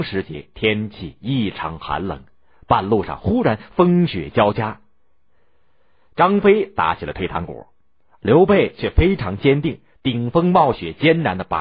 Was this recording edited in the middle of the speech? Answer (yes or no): no